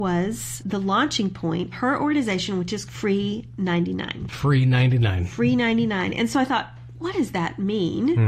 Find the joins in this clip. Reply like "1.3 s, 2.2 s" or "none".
1.7 s, 2.9 s